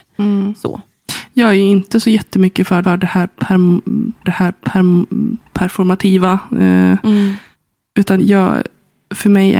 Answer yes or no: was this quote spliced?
yes